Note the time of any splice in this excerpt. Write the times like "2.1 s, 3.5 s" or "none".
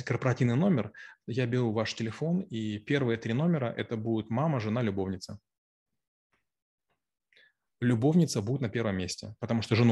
none